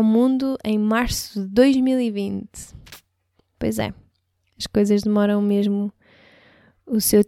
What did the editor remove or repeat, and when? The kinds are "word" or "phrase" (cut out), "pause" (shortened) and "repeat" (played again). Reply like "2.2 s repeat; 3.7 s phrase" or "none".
none